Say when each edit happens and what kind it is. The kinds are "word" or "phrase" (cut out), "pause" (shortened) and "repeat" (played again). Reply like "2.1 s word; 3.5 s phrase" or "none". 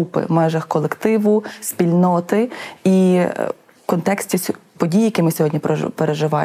none